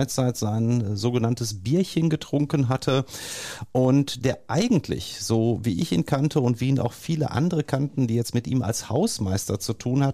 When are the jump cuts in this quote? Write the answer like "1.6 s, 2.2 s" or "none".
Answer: none